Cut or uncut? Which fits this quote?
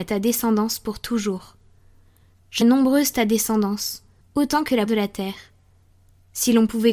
cut